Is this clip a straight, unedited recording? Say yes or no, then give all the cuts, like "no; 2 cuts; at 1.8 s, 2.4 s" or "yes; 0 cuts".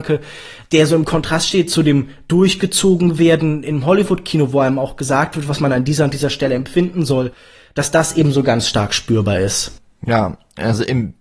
yes; 0 cuts